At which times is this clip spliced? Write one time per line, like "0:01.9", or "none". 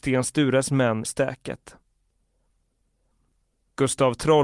0:01.0